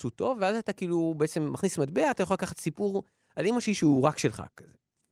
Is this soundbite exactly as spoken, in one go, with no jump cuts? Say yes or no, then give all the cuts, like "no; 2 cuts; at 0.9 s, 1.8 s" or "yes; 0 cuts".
no; 1 cut; at 2.2 s